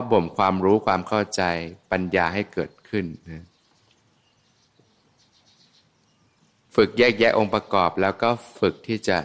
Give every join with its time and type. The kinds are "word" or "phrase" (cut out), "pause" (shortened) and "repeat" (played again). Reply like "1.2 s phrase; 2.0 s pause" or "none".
none